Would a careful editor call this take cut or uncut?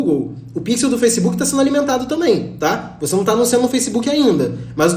uncut